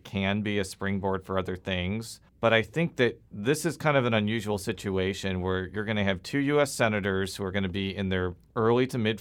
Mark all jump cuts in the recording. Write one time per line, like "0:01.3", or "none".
0:02.3

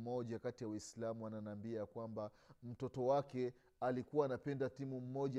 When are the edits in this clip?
none

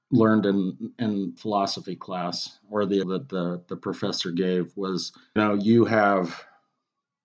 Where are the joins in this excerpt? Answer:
0:01.4
0:03.0
0:05.4

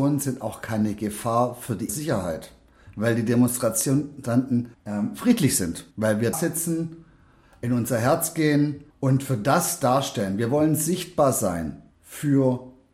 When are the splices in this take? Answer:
0:01.9
0:04.7
0:05.9
0:06.3
0:08.9
0:11.9

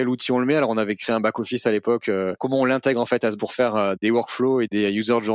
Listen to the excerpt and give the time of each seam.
0:03.4

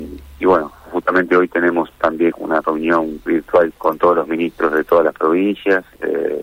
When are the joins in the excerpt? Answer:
0:02.3
0:03.3
0:03.7

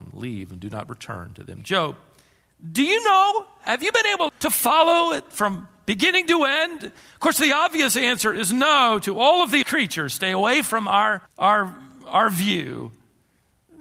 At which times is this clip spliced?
0:04.3
0:09.6
0:11.3

